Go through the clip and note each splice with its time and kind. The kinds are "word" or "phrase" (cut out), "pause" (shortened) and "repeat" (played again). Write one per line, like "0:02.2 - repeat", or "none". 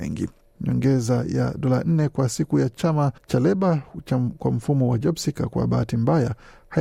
0:03.2 - pause